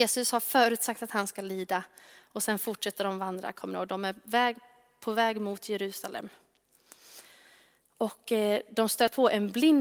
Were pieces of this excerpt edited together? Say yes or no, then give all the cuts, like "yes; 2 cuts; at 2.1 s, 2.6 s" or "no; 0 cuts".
no; 0 cuts